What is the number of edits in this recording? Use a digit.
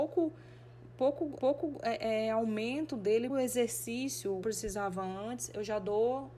3